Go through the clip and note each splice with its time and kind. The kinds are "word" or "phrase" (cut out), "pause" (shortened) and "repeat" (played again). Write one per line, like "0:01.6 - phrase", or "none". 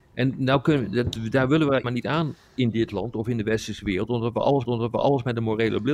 0:01.8 - phrase
0:04.6 - repeat